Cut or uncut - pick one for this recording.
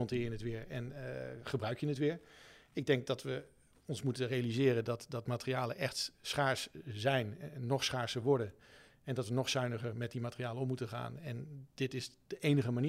uncut